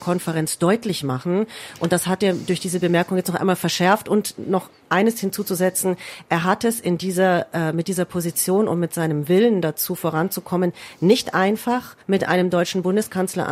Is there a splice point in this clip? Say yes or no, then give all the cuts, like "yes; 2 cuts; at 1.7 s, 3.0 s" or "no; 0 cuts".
yes; 1 cut; at 12.0 s